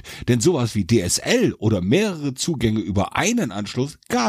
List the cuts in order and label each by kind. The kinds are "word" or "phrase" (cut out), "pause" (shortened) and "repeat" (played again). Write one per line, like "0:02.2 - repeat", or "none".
none